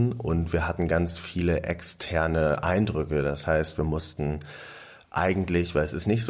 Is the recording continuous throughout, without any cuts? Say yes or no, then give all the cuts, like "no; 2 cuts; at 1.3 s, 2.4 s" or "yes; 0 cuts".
yes; 0 cuts